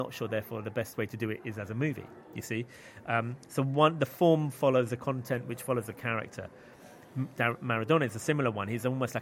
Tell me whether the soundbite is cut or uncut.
uncut